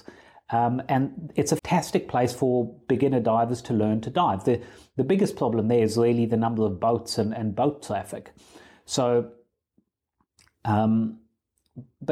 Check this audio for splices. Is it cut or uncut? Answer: cut